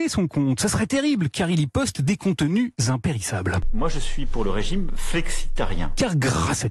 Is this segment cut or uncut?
uncut